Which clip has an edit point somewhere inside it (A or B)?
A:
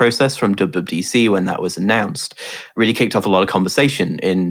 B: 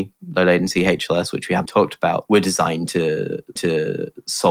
B